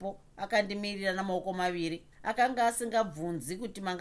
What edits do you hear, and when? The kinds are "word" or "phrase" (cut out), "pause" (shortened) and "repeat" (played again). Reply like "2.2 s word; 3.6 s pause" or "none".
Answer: 2.1 s pause